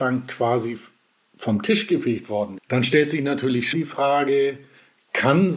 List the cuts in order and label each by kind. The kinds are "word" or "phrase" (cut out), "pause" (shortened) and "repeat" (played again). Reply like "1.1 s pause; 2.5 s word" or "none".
2.6 s word; 3.7 s word